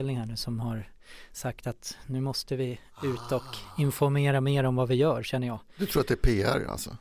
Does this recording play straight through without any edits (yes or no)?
yes